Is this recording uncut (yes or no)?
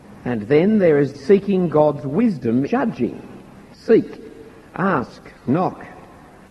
no